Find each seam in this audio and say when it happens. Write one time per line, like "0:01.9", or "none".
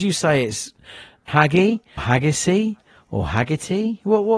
0:01.3
0:02.0